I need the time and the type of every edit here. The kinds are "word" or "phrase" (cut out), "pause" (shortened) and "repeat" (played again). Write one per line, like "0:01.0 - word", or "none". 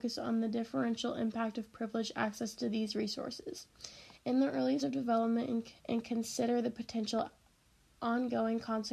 0:04.8 - word
0:05.8 - pause